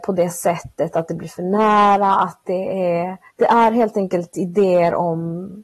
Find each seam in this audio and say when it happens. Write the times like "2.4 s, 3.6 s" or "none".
3.3 s